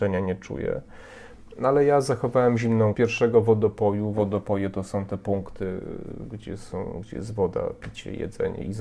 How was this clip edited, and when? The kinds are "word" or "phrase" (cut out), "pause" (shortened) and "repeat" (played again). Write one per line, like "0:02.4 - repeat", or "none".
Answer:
0:02.9 - phrase

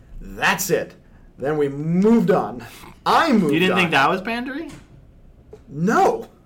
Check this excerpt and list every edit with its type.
0:03.0 - pause

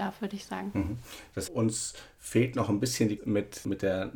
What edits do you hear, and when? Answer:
0:01.5 - word
0:03.2 - word

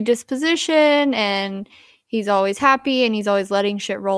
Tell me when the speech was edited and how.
none

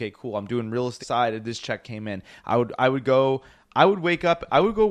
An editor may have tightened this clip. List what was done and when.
0:01.0 - phrase
0:01.8 - word

